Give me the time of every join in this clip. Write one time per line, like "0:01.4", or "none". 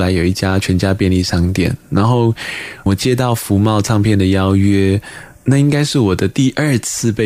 0:02.9